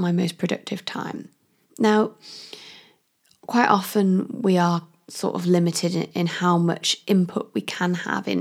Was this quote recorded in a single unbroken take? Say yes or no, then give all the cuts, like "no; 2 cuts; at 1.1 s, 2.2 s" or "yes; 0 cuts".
yes; 0 cuts